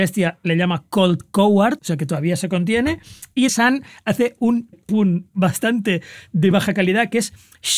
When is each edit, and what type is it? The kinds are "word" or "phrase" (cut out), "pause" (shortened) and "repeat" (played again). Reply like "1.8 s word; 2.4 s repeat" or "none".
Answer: 1.8 s word; 3.5 s word; 4.7 s word; 5.3 s pause; 6.5 s word